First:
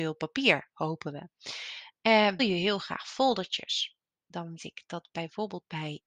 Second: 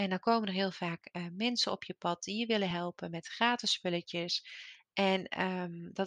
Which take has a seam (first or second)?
first